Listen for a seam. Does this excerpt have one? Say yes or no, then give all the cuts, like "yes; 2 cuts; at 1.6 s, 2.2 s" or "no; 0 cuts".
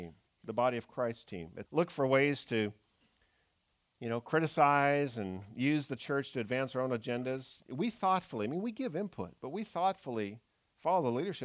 yes; 1 cut; at 1.7 s